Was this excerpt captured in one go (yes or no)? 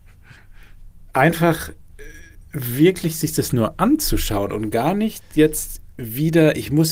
yes